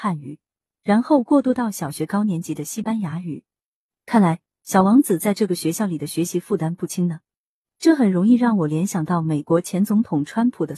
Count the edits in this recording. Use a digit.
0